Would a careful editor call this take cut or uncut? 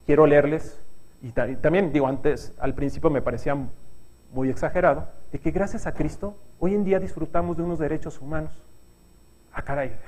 cut